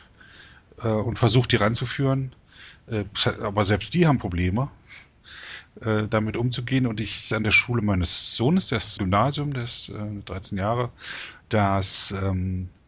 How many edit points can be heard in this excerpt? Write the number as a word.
three